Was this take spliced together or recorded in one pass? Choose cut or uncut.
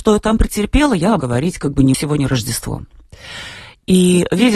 cut